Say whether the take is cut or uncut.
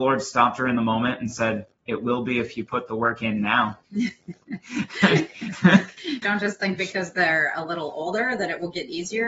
cut